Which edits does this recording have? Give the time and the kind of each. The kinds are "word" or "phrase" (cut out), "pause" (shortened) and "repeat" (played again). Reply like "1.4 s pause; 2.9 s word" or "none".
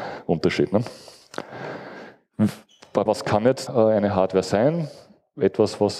3.1 s word; 3.7 s word